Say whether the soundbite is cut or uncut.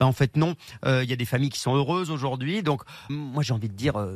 cut